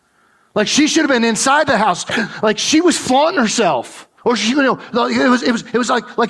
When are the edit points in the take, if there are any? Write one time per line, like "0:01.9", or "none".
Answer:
0:04.2